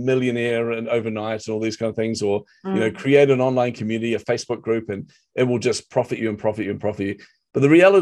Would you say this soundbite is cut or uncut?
uncut